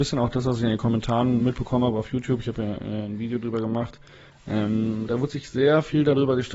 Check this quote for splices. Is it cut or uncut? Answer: uncut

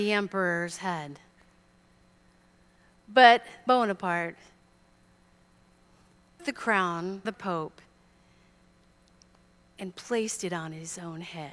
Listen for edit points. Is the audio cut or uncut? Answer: cut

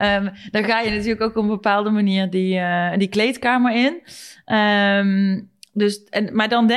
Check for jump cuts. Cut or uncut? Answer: uncut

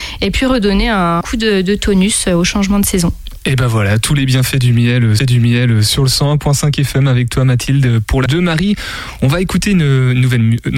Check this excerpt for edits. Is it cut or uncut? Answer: cut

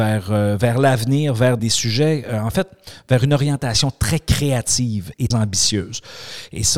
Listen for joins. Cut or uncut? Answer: cut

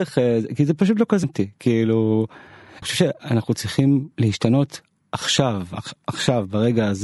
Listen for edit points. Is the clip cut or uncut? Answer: cut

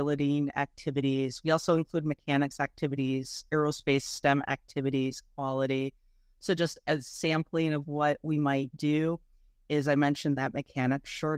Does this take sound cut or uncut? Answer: uncut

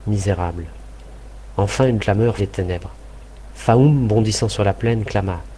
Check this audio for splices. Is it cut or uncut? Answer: cut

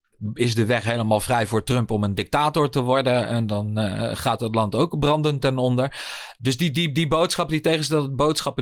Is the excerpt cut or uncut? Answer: uncut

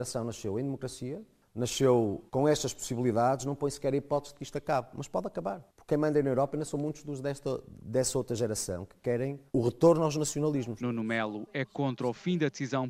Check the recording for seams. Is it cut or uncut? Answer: cut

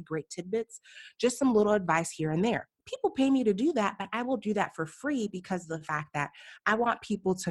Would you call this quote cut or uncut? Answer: cut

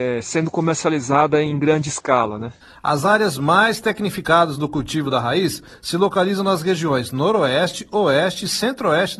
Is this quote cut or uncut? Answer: uncut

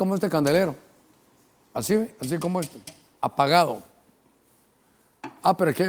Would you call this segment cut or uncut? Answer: uncut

